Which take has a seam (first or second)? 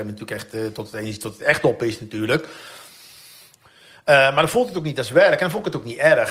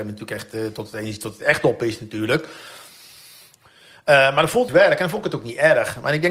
second